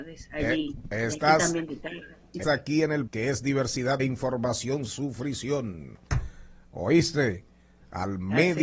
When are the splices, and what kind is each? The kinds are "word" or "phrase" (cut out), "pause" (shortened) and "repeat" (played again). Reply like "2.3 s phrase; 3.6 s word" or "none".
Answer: 2.4 s word; 3.1 s word; 4.0 s word; 4.9 s word